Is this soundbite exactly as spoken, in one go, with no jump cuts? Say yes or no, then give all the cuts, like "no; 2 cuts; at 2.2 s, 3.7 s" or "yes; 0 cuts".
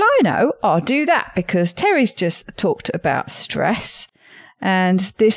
yes; 0 cuts